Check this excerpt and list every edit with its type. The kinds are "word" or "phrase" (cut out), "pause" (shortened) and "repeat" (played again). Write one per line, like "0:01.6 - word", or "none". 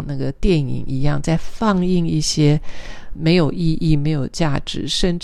0:03.1 - word